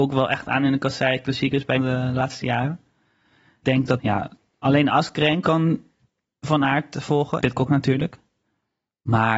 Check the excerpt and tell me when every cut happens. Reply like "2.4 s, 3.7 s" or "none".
1.8 s, 3.6 s, 4.0 s, 7.4 s